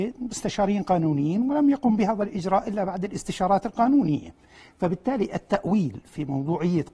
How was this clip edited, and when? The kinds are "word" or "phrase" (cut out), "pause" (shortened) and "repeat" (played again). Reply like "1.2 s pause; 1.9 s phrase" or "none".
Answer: none

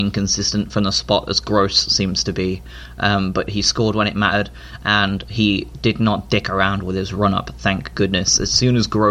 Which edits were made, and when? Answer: none

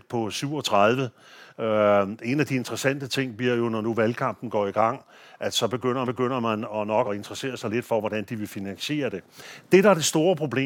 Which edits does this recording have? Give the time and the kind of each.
6.0 s repeat; 7.0 s word

